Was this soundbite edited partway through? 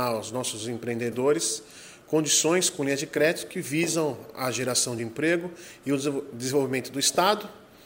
no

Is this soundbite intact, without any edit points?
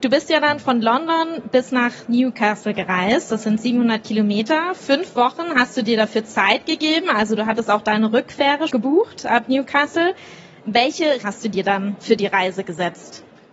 no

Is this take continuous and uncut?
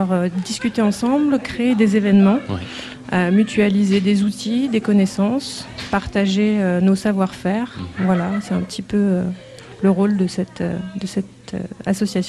yes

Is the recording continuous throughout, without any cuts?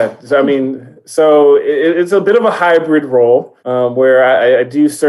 no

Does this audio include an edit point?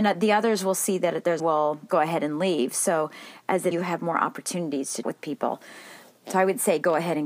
yes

